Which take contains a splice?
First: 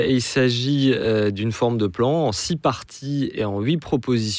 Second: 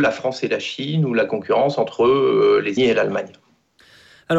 second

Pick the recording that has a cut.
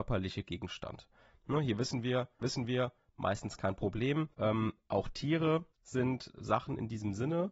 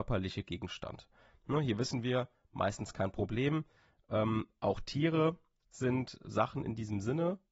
first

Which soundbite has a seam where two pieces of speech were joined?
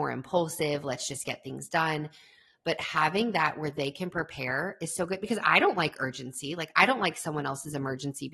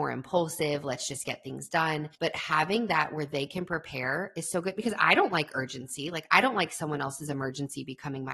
second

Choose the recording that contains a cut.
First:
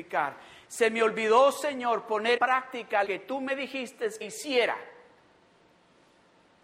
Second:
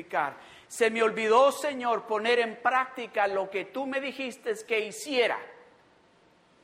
first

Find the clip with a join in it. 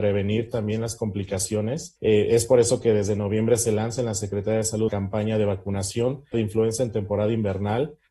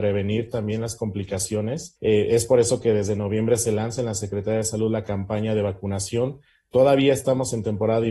first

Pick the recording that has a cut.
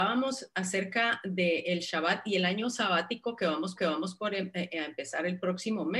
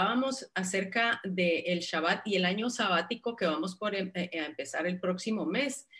first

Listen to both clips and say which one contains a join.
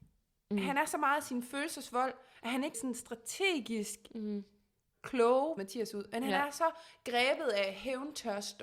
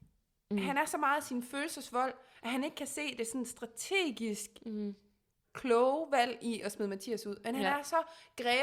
first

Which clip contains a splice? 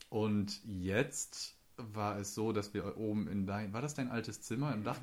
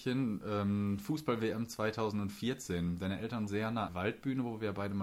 second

